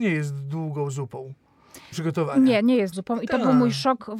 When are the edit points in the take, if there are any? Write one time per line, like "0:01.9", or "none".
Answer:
0:01.9
0:02.9

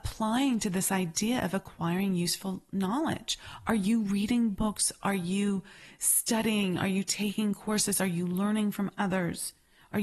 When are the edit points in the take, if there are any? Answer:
none

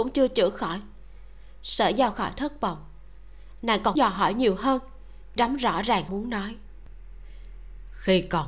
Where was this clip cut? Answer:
0:02.1
0:04.0
0:05.4
0:06.1

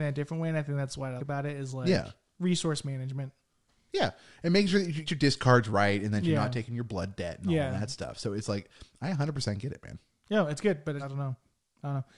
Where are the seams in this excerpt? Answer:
0:01.2
0:05.1
0:11.0

